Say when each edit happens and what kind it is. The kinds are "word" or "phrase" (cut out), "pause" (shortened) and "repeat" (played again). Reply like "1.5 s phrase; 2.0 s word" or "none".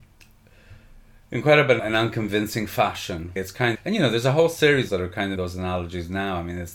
1.8 s word; 3.4 s word; 3.7 s word; 4.9 s phrase; 5.4 s word